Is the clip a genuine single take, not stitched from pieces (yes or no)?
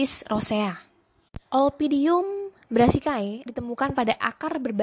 no